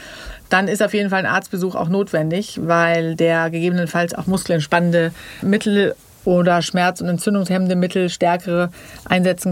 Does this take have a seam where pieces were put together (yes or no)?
yes